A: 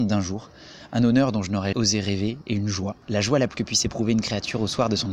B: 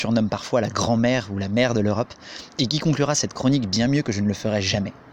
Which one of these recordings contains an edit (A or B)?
A